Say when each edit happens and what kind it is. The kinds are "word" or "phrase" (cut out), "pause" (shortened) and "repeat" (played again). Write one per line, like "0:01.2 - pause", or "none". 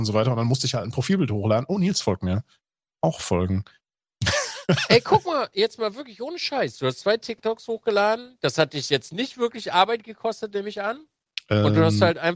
none